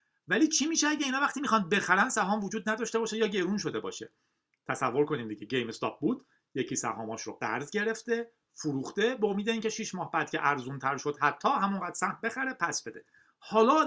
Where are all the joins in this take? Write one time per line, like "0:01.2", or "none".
none